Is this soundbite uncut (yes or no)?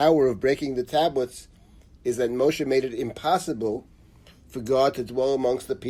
yes